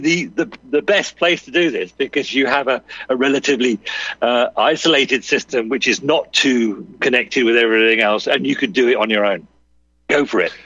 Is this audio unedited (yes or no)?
yes